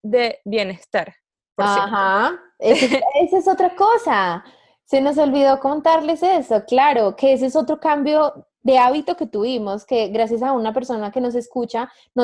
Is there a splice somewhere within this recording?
no; 0 cuts

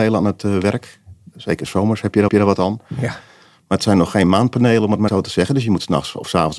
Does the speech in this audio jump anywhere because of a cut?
yes; 2 cuts; at 2.3 s, 5.1 s

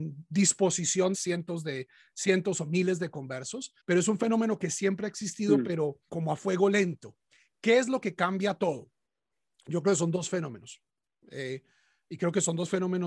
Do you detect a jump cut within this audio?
yes; 3 cuts; at 1.1 s, 3.8 s, 6.1 s

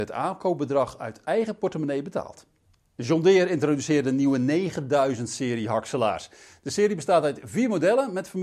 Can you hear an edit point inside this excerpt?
no; 0 cuts

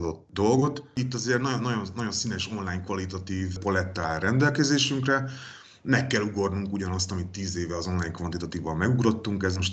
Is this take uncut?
yes; 0 cuts

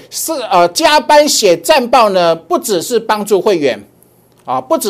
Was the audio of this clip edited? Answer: no; 0 cuts

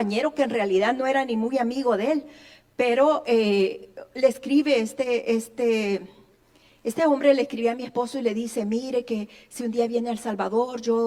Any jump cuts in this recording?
no; 0 cuts

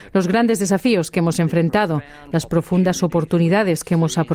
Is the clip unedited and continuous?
yes; 0 cuts

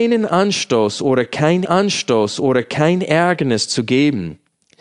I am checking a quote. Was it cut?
yes; 1 cut; at 1.6 s

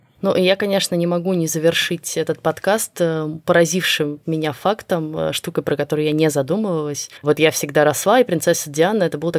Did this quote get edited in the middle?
yes; 1 cut; at 7.2 s

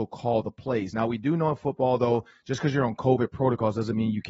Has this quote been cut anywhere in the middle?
no; 0 cuts

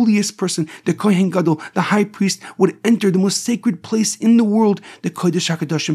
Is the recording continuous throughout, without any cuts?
yes; 0 cuts

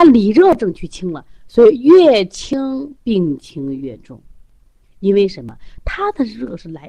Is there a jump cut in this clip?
no; 0 cuts

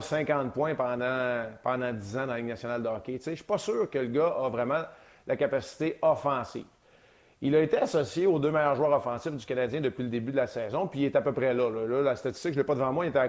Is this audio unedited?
yes; 0 cuts

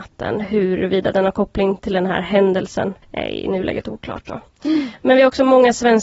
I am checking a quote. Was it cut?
yes; 1 cut; at 3.0 s

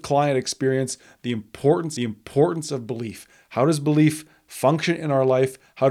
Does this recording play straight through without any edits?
no; 1 cut; at 2.0 s

